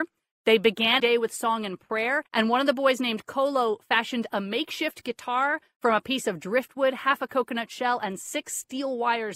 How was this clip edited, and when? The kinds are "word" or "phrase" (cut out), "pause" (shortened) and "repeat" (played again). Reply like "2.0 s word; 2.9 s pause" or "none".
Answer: 1.0 s phrase; 2.3 s pause

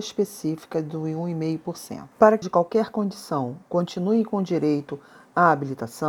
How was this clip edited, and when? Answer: 2.1 s pause; 2.4 s phrase

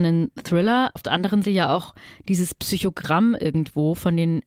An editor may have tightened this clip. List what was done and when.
1.0 s word; 1.4 s word

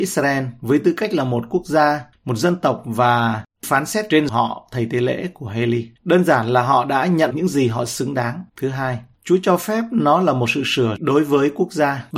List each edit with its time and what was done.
4.3 s word; 6.0 s pause; 7.3 s word; 8.5 s pause; 11.0 s word

